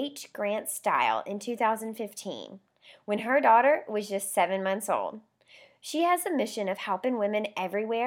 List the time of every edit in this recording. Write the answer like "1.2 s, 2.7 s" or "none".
none